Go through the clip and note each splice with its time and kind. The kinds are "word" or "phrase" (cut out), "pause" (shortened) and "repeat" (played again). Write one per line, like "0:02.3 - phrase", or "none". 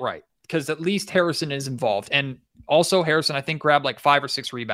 none